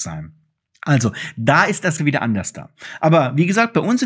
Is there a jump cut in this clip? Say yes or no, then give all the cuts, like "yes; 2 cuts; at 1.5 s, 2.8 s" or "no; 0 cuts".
yes; 1 cut; at 2.0 s